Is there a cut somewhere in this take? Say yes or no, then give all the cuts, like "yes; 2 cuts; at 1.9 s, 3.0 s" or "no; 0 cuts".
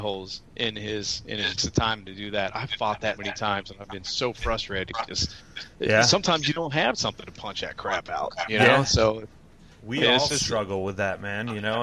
yes; 2 cuts; at 1.6 s, 3.2 s